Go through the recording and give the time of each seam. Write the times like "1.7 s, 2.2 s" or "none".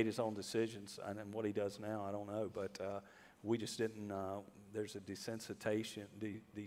none